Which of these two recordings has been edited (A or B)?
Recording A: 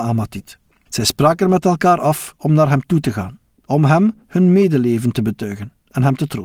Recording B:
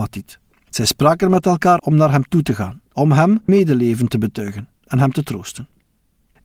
B